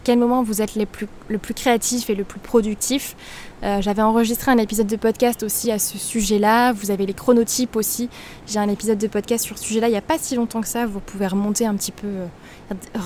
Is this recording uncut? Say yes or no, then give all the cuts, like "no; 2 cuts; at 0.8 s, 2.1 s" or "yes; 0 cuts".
yes; 0 cuts